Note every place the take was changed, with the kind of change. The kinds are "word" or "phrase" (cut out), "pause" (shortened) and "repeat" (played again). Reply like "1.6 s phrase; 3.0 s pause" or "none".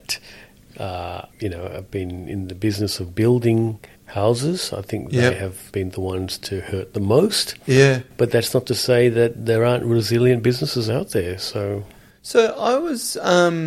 1.3 s pause; 3.9 s pause; 5.7 s pause

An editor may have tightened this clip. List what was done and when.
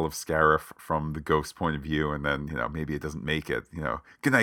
none

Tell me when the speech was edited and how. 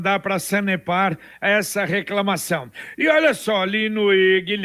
none

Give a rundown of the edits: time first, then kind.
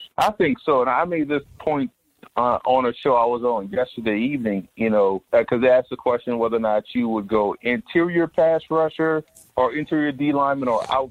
5.3 s pause

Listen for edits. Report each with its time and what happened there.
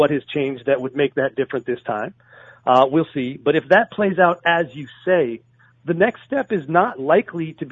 none

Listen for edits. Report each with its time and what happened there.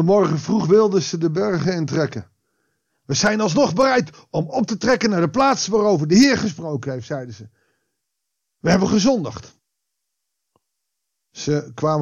none

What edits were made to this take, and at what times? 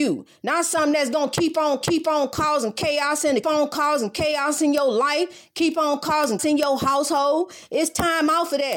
1.8 s repeat; 3.4 s phrase; 6.4 s word

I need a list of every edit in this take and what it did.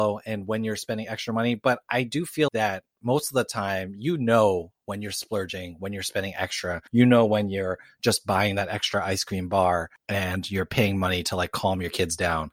2.5 s word

